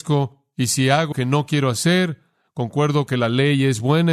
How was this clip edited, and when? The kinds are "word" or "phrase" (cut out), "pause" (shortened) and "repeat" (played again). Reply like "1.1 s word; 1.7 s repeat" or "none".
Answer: 1.1 s word; 3.1 s word

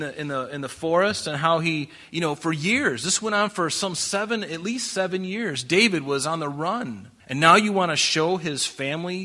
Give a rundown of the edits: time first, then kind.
7.2 s pause

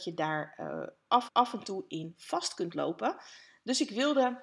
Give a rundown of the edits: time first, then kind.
1.3 s repeat

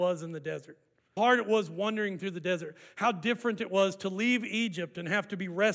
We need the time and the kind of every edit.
1.2 s word

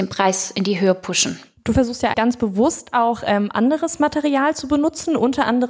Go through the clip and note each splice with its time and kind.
2.1 s word

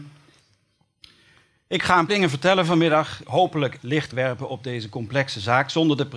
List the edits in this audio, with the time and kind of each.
2.1 s word; 3.2 s word; 3.8 s word; 4.1 s word

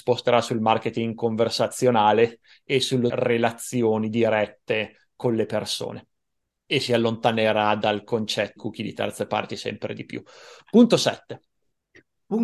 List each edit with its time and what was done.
3.1 s word; 6.6 s word; 8.6 s word

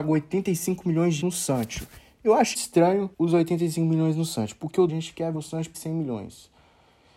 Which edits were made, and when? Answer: 1.2 s word; 2.5 s word; 3.1 s pause; 4.9 s phrase; 5.3 s word; 5.7 s word

